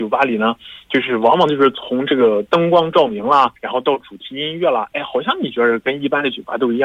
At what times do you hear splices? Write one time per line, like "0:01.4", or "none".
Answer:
0:03.6